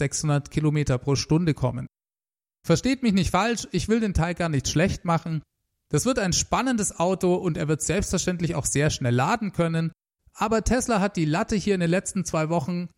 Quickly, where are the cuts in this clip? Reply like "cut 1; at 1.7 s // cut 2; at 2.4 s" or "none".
none